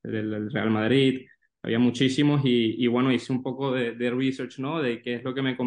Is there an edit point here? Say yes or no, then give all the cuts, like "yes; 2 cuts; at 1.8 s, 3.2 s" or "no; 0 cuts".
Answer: no; 0 cuts